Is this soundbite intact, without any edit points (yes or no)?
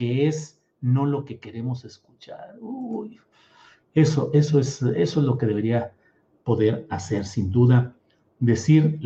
yes